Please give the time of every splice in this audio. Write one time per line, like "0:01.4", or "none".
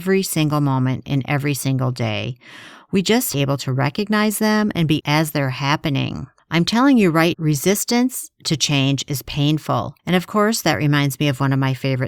0:03.3
0:05.0
0:07.3
0:10.0